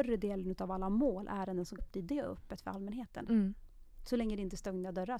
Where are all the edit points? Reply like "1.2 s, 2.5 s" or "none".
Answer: 1.8 s